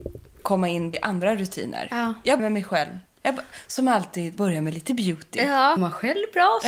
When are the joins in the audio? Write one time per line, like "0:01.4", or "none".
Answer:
0:00.9
0:02.4
0:04.4
0:05.8